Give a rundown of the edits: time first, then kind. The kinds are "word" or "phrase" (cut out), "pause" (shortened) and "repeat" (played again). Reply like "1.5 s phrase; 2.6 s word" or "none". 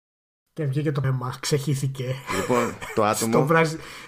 1.0 s word